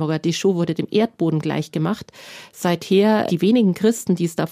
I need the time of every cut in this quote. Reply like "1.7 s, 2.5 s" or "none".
3.3 s